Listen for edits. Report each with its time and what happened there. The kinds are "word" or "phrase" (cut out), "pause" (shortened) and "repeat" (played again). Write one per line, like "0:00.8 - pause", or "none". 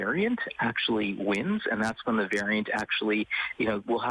none